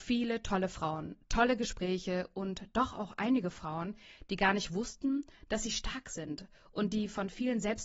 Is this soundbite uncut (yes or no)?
yes